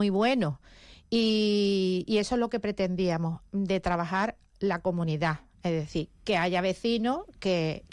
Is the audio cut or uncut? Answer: uncut